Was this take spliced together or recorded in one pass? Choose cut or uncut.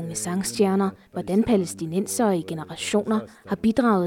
uncut